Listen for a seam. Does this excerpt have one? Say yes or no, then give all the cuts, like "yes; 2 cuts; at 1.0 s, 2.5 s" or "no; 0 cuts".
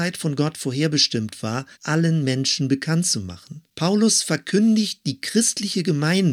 yes; 2 cuts; at 1.7 s, 3.7 s